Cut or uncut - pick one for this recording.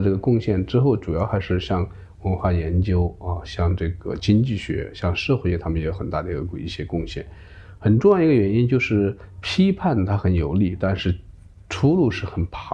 uncut